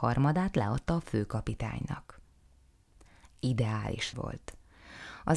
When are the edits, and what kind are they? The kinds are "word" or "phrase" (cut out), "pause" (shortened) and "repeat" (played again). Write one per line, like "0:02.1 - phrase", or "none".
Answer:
0:04.1 - word